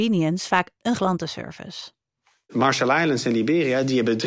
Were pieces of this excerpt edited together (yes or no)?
yes